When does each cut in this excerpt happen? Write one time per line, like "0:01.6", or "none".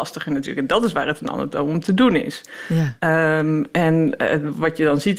none

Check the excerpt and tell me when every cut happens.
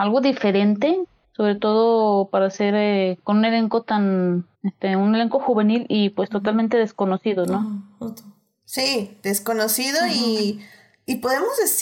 0:01.2
0:04.5

